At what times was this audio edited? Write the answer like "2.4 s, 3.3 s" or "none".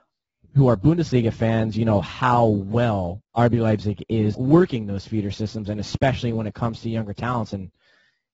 3.3 s, 4.3 s

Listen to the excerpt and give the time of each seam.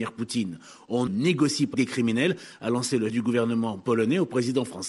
1.1 s, 1.7 s, 3.1 s

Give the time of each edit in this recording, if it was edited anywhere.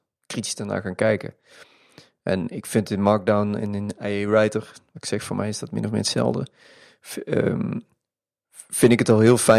none

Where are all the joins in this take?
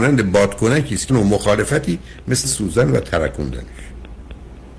1.1 s, 2.4 s

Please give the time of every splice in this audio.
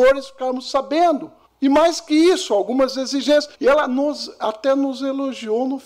1.5 s, 3.5 s

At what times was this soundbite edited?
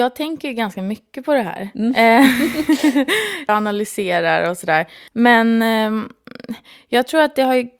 3.5 s, 5.1 s

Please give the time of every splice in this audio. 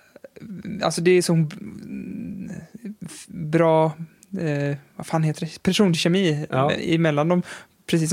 none

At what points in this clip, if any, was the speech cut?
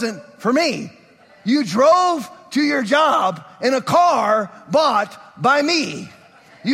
none

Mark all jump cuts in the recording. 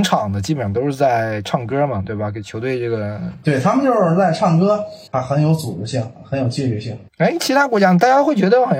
5.1 s, 7.1 s

